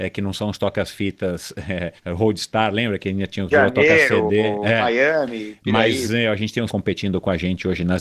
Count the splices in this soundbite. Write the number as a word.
three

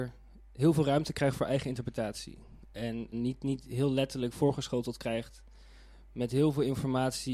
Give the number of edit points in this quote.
one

